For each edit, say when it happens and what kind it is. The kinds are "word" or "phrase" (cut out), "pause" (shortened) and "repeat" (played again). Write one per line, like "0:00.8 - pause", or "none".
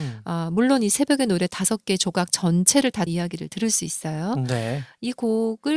0:03.1 - phrase

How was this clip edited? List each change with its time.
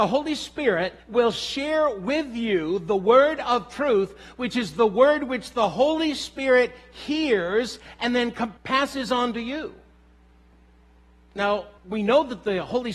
0:01.0 - pause
0:08.6 - pause
0:11.8 - pause

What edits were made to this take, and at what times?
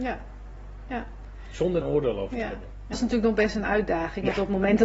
0:01.8 - word
0:02.9 - word

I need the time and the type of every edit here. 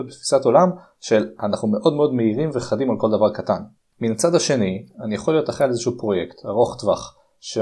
0:03.8 - pause

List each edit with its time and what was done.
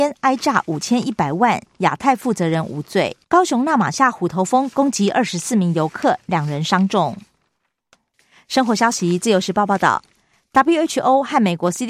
0:03.2 - pause
0:08.1 - pause

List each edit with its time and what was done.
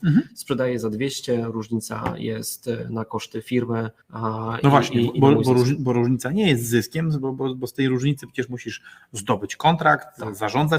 0:04.0 - pause

